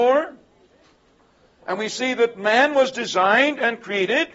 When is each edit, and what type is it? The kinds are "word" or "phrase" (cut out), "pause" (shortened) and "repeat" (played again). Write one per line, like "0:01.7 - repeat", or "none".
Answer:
none